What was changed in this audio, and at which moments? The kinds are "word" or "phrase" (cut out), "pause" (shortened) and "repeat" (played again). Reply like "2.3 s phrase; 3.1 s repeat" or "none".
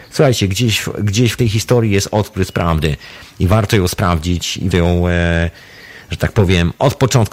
1.4 s word; 4.7 s word